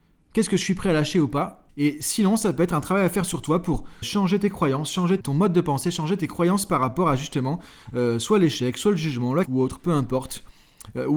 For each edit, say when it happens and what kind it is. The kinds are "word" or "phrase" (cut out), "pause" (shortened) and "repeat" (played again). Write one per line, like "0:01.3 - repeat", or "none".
0:01.7 - pause
0:04.0 - word
0:05.2 - word
0:09.4 - word